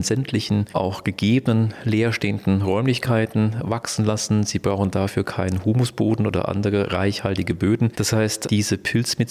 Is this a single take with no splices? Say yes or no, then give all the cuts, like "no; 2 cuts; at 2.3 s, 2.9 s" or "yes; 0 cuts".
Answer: yes; 0 cuts